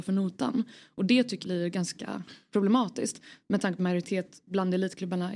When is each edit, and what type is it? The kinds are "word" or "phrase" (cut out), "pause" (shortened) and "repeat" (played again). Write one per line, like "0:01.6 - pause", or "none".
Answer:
0:01.4 - word
0:03.8 - phrase